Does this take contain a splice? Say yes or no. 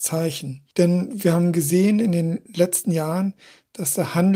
no